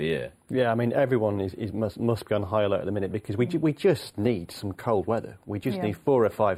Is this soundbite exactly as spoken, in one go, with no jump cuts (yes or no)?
yes